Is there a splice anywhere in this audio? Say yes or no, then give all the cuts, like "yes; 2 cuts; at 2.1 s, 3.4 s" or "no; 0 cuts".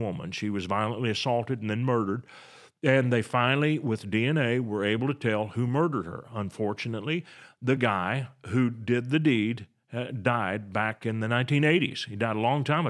no; 0 cuts